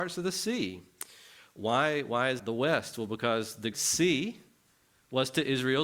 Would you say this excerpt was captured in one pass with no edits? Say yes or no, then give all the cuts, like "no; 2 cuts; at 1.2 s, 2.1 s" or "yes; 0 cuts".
no; 2 cuts; at 2.4 s, 3.7 s